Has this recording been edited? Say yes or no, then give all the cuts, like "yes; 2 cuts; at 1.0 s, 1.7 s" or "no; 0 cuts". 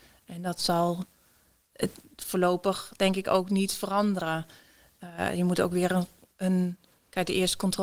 no; 0 cuts